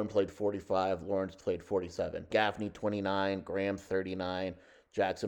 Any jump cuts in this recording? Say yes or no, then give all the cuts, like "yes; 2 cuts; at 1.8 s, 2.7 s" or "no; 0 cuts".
yes; 1 cut; at 2.3 s